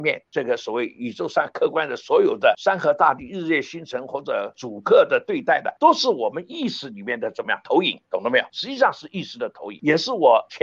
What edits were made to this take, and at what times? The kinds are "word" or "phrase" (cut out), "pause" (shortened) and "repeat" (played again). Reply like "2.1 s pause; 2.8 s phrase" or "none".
5.8 s pause; 8.5 s pause